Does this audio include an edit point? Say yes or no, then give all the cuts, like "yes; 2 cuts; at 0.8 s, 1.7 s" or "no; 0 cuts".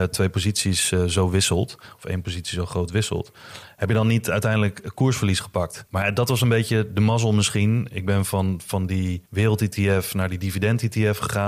yes; 2 cuts; at 5.9 s, 9.3 s